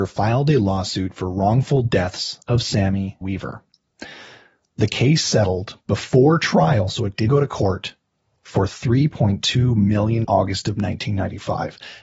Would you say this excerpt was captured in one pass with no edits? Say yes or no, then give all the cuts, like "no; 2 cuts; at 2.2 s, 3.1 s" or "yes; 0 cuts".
no; 3 cuts; at 3.2 s, 7.3 s, 10.2 s